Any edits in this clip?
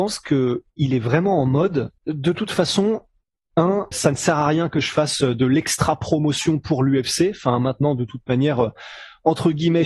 yes; 2 cuts; at 2.0 s, 3.9 s

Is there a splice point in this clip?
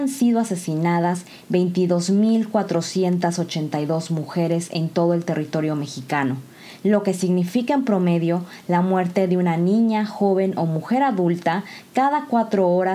no; 0 cuts

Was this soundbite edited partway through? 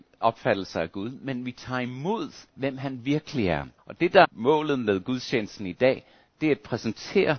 yes; 3 cuts; at 2.5 s, 3.8 s, 4.2 s

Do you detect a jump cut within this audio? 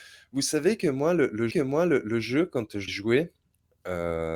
yes; 2 cuts; at 1.5 s, 2.9 s

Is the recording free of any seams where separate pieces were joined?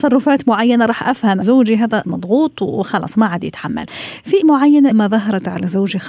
no; 4 cuts; at 1.4 s, 2.0 s, 4.4 s, 4.9 s

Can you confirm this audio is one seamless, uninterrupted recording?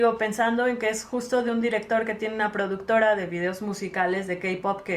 yes; 0 cuts

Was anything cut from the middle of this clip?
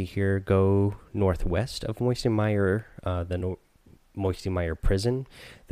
no; 0 cuts

